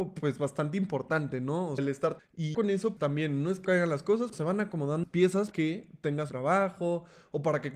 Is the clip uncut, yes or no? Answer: no